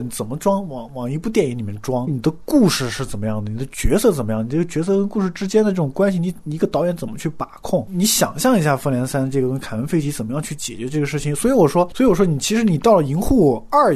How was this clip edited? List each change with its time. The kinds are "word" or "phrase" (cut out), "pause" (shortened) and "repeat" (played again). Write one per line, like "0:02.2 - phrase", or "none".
0:02.1 - phrase